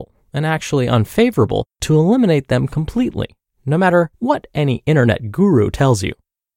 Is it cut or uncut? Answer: cut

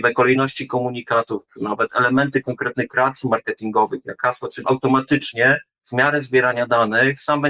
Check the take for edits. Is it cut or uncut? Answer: cut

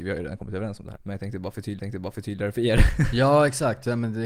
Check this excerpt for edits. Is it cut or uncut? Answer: cut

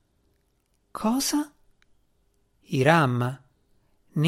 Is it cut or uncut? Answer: uncut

